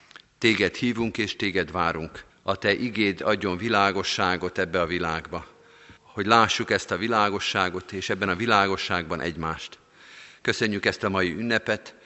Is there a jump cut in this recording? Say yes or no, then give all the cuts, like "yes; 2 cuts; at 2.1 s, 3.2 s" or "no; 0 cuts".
yes; 2 cuts; at 2.3 s, 6.0 s